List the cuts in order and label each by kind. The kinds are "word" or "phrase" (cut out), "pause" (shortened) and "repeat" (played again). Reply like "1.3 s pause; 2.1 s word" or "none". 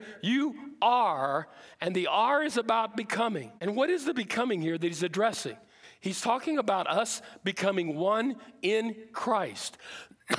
3.6 s pause